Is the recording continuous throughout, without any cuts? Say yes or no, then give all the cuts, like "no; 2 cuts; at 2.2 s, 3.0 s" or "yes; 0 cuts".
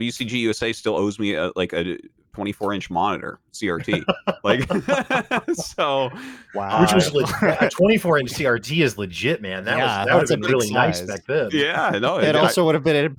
yes; 0 cuts